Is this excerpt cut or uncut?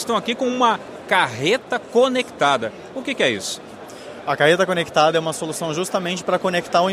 uncut